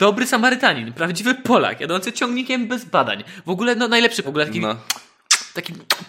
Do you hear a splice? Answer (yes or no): yes